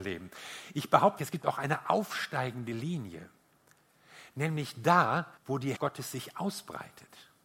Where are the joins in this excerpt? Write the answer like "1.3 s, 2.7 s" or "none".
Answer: 1.2 s, 5.4 s, 5.8 s